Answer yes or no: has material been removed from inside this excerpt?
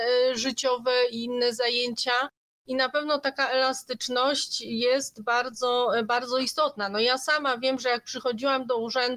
no